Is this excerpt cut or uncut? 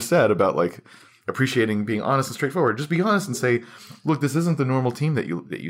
uncut